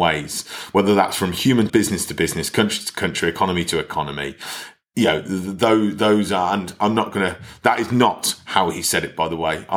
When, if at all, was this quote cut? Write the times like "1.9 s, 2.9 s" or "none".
1.7 s